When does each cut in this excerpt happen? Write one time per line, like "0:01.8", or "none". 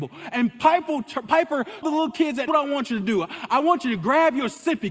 0:01.8
0:02.5

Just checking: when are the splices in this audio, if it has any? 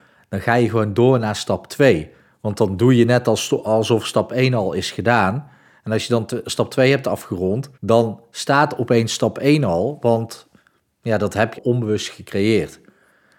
0:07.7
0:11.5

